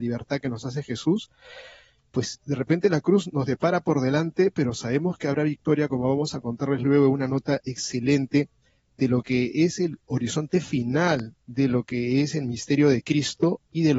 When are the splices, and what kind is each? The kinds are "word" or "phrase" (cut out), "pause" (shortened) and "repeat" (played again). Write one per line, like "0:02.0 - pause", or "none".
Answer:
none